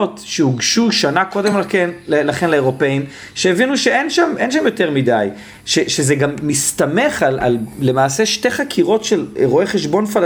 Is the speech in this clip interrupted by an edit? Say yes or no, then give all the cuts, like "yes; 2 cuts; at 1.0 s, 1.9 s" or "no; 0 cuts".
no; 0 cuts